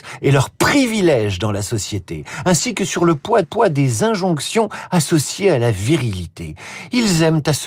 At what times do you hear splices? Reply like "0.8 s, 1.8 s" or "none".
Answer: 3.4 s